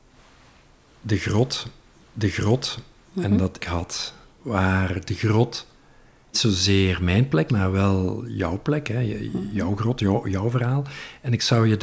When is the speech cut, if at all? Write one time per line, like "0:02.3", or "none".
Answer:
0:02.0
0:03.6
0:04.3
0:06.3
0:07.5